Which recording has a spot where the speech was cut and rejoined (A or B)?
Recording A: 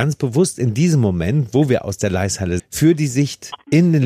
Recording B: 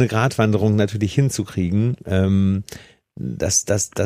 A